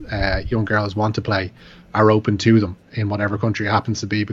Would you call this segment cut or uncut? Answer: uncut